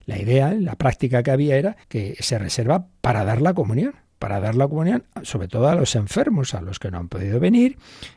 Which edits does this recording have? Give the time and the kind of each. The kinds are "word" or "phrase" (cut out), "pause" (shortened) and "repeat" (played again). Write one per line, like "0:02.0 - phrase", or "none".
0:01.8 - pause